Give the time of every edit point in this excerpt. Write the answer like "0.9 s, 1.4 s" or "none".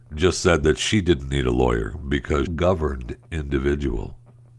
2.5 s

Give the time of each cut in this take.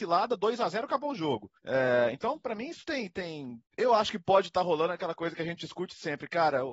1.6 s, 3.7 s

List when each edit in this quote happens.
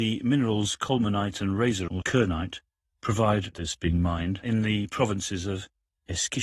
2.0 s, 3.5 s

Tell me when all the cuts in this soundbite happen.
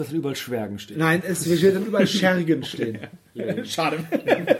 none

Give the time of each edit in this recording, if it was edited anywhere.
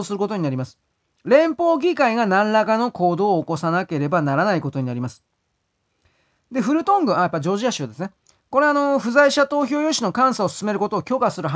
none

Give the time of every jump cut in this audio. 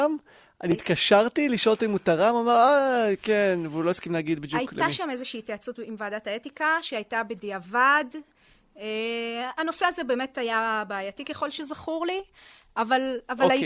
none

